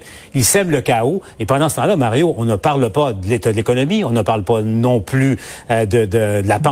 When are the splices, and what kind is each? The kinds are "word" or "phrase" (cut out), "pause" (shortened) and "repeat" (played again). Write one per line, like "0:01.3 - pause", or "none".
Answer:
none

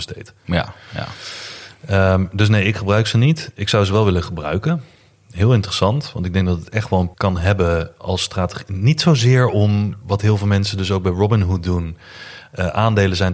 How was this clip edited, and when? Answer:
0:07.1 - word

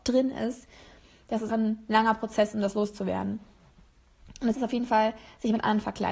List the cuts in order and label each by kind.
0:01.5 - word
0:04.5 - word

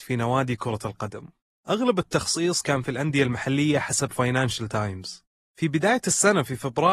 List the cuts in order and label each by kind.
none

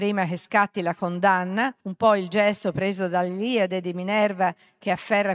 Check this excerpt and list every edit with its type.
0:01.8 - pause

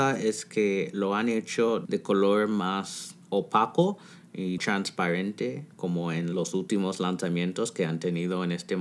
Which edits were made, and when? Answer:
0:04.6 - word

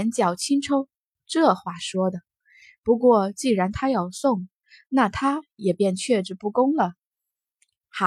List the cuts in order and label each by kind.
none

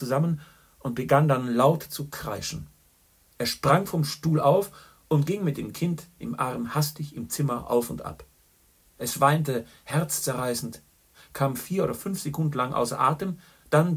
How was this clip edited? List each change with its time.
none

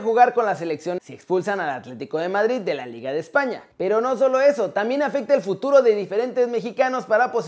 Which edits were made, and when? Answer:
0:01.0 - word
0:03.7 - pause

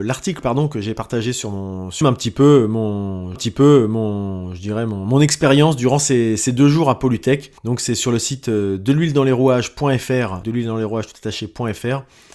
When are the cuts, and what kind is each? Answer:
0:02.0 - phrase
0:03.3 - repeat
0:07.6 - pause
0:10.4 - word

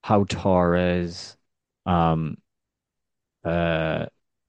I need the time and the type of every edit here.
0:01.6 - pause

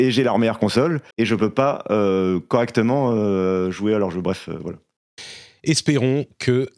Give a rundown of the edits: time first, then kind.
0:01.1 - pause

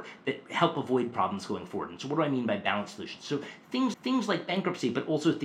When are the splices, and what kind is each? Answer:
0:03.9 - repeat

